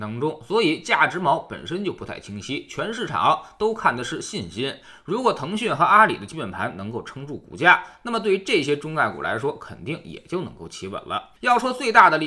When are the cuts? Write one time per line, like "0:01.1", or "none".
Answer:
0:11.4